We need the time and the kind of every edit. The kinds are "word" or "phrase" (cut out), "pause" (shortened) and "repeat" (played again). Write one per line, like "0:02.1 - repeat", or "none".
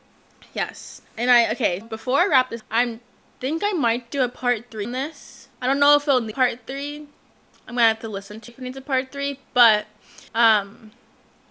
0:01.1 - pause
0:01.8 - word
0:02.6 - word
0:04.8 - word
0:05.5 - pause
0:06.3 - word
0:08.5 - phrase
0:10.3 - pause